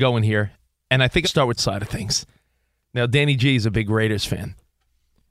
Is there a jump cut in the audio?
yes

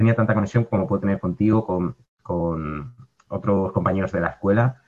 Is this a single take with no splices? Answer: yes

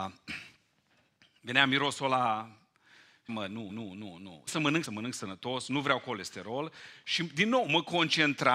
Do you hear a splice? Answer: yes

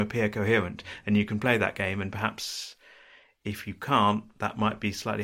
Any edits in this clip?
no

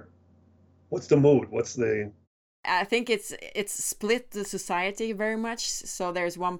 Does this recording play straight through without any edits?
yes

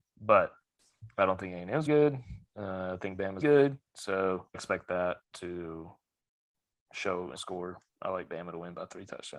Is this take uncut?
no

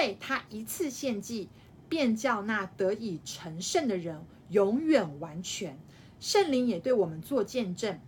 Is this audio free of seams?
yes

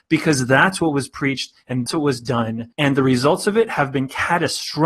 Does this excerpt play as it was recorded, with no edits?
no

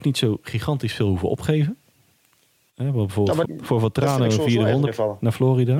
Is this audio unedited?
no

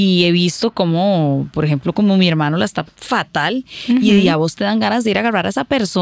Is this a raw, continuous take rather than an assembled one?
no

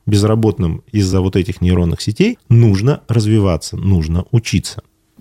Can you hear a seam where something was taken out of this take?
no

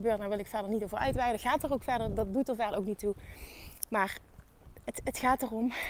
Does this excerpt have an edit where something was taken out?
no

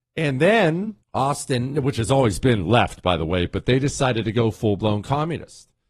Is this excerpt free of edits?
no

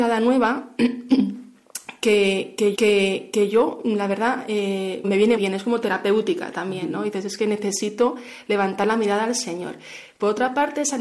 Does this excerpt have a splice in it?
yes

